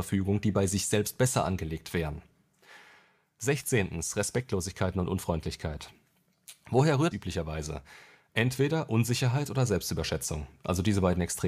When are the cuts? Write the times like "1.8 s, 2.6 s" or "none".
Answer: 7.1 s

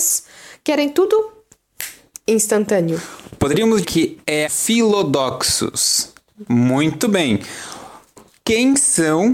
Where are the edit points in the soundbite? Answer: 3.8 s, 4.5 s

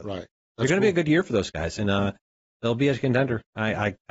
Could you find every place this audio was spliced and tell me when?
none

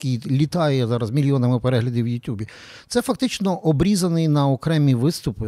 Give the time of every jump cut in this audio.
none

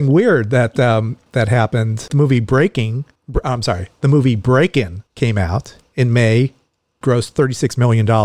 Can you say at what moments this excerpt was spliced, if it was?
5.1 s, 7.0 s

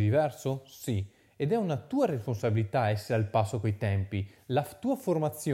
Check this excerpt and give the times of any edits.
none

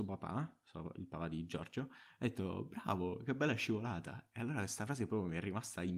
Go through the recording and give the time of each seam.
none

